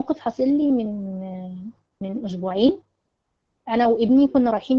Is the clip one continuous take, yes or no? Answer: yes